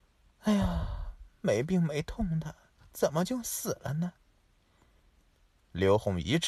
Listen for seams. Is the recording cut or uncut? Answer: uncut